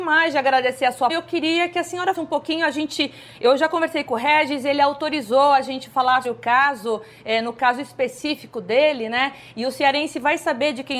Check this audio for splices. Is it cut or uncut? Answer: cut